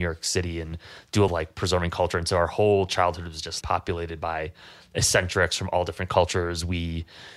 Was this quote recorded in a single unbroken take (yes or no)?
no